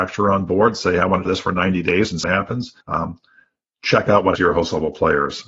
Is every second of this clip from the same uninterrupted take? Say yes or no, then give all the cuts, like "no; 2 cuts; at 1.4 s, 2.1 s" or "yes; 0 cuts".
no; 4 cuts; at 1.2 s, 2.2 s, 2.8 s, 4.3 s